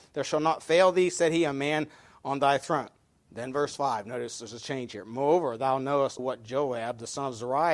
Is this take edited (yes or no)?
yes